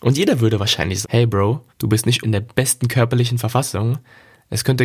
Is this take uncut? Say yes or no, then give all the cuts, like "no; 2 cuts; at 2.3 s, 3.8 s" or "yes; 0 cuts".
no; 3 cuts; at 1.0 s, 1.7 s, 2.2 s